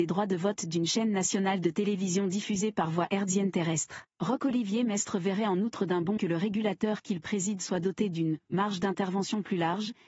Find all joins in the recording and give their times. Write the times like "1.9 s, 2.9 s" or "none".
4.1 s, 6.2 s